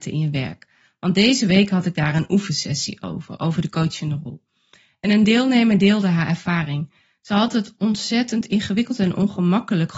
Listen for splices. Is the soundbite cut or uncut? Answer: uncut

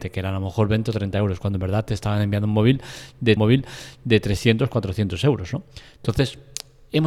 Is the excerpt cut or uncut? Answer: cut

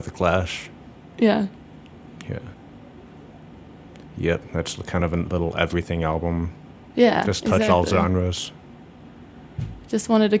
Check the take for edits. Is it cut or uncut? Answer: uncut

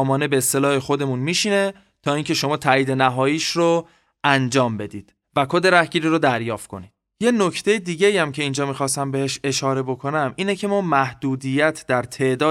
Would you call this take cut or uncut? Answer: uncut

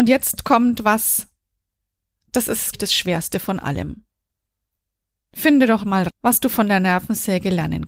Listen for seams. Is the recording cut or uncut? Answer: cut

